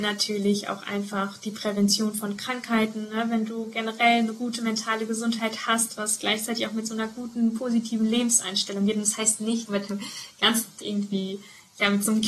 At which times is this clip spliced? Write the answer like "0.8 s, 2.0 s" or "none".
9.7 s, 10.8 s